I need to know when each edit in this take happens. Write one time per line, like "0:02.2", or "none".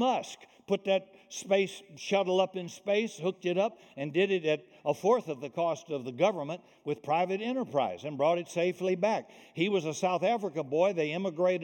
none